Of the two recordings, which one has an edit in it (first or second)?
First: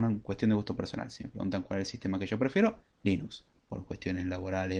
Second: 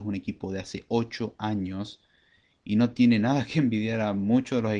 first